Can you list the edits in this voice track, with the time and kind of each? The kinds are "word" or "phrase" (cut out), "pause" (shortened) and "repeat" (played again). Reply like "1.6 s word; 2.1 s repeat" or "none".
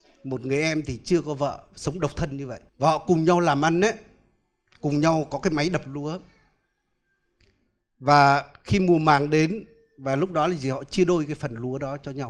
2.7 s pause